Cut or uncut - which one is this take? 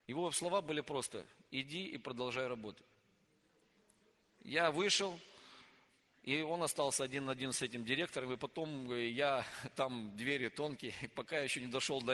uncut